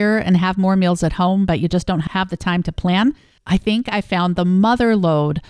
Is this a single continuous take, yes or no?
yes